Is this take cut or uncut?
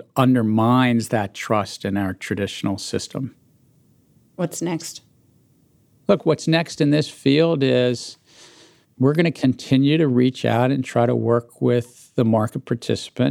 uncut